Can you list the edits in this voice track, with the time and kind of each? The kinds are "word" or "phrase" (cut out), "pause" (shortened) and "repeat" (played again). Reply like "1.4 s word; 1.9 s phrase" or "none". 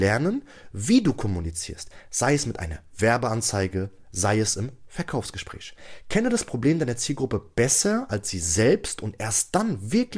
none